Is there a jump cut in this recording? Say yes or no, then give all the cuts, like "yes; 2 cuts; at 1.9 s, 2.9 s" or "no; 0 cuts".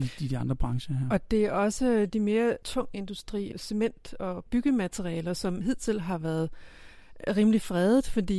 no; 0 cuts